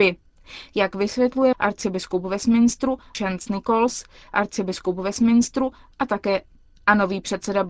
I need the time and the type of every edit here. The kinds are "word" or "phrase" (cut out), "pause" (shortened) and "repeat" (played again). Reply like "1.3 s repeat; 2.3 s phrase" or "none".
1.5 s phrase